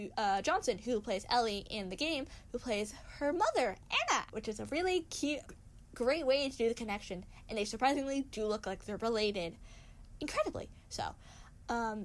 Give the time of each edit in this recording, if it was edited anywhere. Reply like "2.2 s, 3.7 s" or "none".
4.3 s, 5.4 s